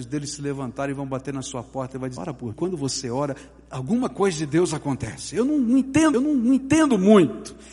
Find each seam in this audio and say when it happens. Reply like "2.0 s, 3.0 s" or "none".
2.2 s, 2.5 s, 6.1 s